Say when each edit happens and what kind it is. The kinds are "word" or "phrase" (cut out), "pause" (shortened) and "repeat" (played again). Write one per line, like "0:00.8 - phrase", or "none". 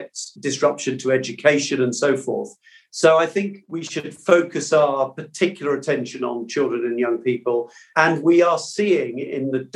none